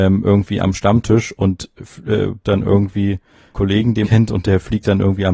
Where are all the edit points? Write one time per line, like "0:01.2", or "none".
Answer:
0:02.4
0:03.5
0:04.0